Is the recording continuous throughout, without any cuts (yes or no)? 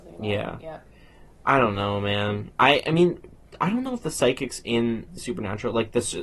no